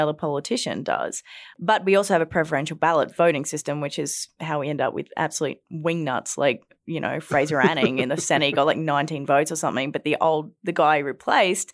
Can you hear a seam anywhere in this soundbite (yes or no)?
no